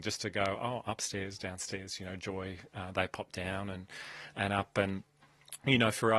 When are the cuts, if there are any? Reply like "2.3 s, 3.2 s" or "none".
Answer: none